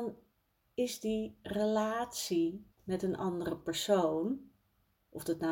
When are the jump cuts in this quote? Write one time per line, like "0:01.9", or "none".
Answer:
0:02.7

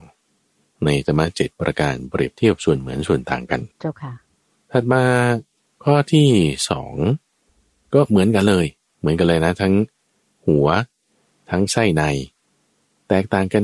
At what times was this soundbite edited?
0:03.7

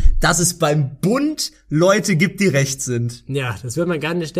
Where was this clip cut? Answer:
none

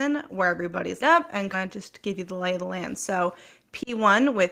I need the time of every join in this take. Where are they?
0:01.0
0:01.5

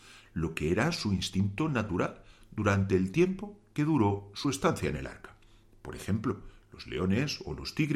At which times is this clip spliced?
none

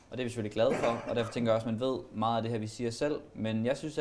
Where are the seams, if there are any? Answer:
none

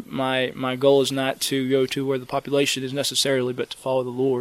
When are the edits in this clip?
none

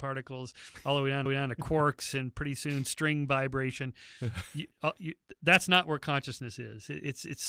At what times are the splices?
0:01.3

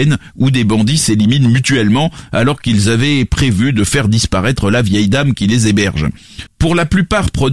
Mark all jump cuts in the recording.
none

